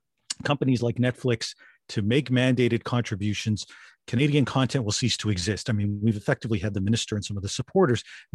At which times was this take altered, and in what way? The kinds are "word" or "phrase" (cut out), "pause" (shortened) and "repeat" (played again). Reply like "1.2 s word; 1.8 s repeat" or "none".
none